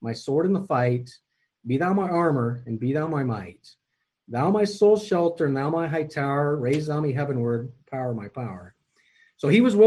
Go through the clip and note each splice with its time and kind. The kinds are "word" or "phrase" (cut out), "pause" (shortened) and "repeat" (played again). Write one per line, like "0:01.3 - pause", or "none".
none